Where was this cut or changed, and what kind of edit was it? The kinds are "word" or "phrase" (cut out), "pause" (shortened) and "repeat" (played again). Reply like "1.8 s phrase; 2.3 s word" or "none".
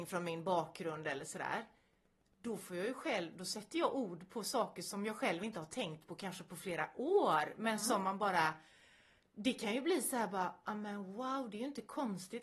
none